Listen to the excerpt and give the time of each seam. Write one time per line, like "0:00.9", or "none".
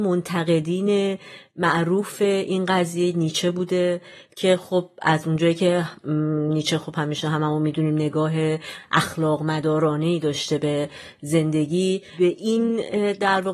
none